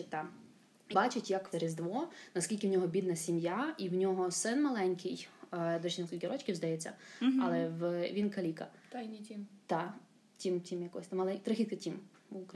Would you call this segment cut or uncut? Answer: cut